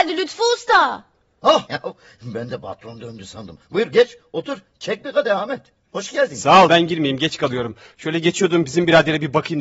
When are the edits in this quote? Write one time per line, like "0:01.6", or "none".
0:01.7
0:06.7